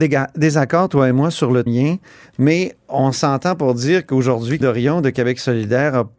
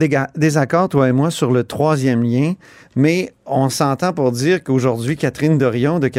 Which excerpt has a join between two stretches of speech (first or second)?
first